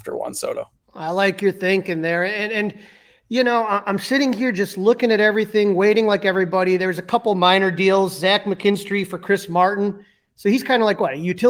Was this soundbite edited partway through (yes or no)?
no